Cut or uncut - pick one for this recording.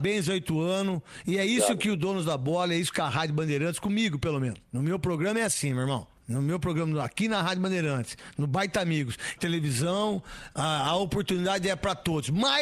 cut